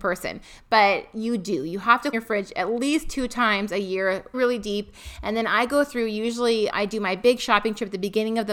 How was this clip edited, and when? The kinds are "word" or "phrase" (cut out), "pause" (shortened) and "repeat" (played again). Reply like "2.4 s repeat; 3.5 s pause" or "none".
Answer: 2.1 s word; 4.3 s word; 6.7 s word